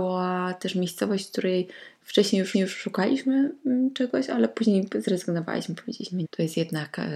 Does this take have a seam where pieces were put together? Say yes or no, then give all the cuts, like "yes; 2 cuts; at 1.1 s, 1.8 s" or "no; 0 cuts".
yes; 2 cuts; at 2.5 s, 6.2 s